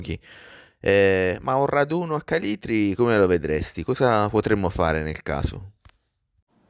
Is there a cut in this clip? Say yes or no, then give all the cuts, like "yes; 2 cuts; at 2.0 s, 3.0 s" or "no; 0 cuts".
no; 0 cuts